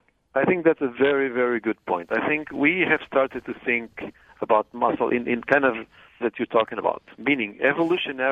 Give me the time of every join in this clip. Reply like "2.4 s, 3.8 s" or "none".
6.2 s